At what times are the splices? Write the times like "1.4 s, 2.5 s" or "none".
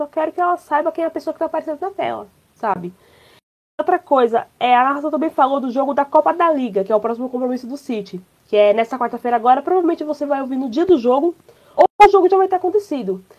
none